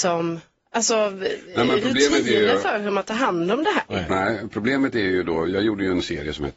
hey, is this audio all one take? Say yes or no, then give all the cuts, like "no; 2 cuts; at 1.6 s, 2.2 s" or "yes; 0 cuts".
yes; 0 cuts